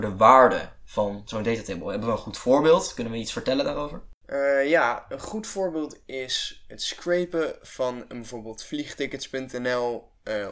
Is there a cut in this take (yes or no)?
yes